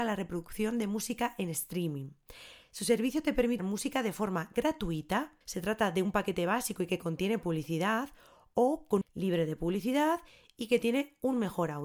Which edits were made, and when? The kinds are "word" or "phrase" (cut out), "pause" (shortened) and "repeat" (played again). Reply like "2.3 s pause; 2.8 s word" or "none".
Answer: 3.6 s word; 5.4 s pause; 9.0 s phrase